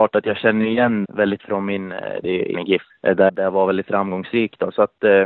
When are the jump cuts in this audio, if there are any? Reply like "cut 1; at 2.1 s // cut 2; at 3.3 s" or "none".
cut 1; at 1.0 s // cut 2; at 1.4 s // cut 3; at 2.2 s // cut 4; at 2.5 s // cut 5; at 2.9 s // cut 6; at 3.3 s

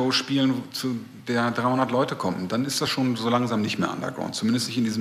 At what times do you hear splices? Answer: none

